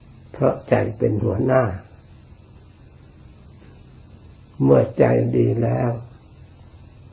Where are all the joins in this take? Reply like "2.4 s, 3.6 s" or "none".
4.3 s